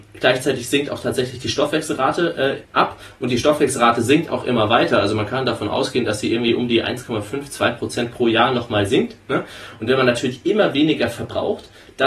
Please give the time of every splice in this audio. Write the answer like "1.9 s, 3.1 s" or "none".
2.6 s